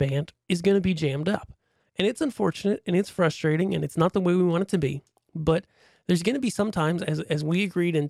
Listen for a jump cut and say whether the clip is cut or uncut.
uncut